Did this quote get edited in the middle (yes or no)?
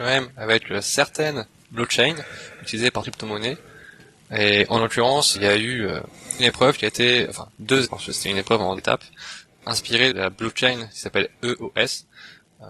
yes